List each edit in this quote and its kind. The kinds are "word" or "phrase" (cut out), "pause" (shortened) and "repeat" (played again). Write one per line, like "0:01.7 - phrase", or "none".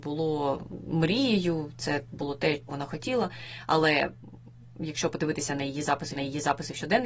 0:02.7 - word
0:06.2 - repeat